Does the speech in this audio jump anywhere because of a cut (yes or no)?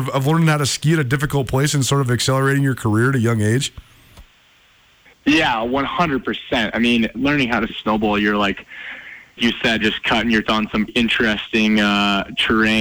yes